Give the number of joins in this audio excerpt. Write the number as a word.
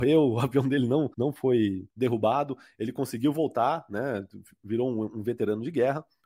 two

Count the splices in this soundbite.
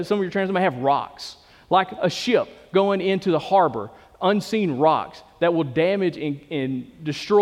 zero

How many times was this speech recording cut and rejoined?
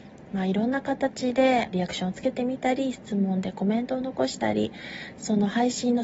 one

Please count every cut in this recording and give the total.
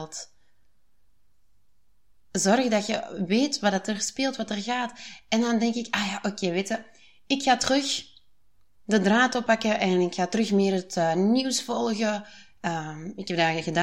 zero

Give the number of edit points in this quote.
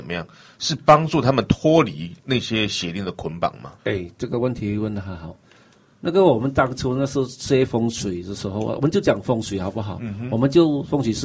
two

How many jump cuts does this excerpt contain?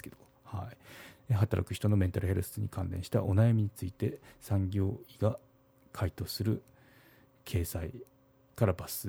zero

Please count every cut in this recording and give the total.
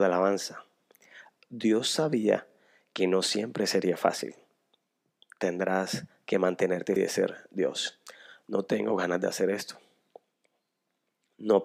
one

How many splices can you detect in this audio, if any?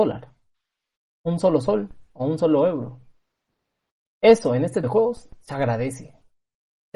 two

